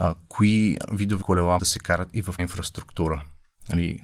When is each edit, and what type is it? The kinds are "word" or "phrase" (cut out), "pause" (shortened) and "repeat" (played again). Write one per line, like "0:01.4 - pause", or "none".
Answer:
0:01.2 - word
0:01.6 - word
0:02.4 - word